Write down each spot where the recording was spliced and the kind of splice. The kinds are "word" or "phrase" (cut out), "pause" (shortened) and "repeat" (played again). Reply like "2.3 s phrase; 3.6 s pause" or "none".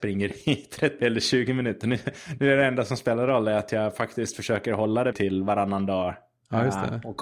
1.0 s word; 5.1 s word